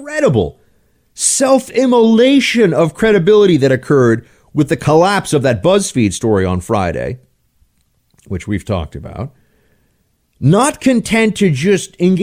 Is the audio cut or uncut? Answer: uncut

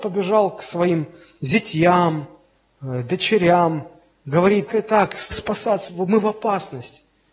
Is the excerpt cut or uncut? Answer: cut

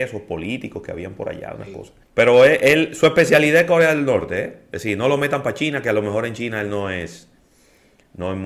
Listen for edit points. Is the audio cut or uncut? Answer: cut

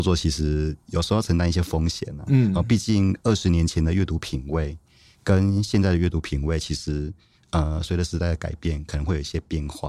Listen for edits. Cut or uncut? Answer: uncut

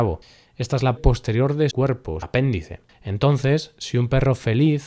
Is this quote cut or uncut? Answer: cut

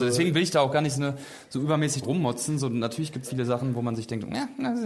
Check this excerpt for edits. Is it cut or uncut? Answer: cut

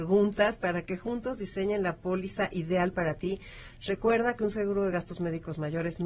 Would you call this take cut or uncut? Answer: uncut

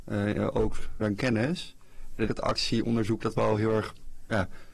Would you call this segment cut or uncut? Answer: cut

